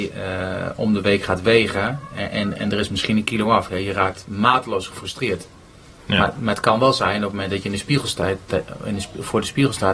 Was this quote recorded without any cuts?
no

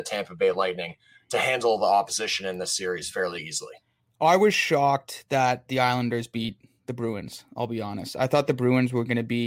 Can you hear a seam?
no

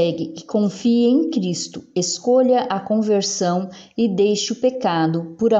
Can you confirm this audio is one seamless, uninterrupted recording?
yes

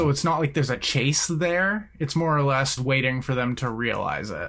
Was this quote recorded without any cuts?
no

